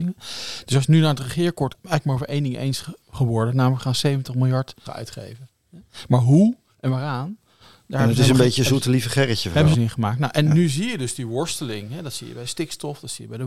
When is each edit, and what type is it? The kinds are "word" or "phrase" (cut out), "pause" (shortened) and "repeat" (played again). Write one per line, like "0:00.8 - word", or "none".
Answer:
0:01.7 - phrase
0:03.0 - pause
0:04.9 - word
0:09.7 - phrase